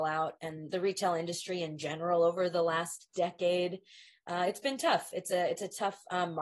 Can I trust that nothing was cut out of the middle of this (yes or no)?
yes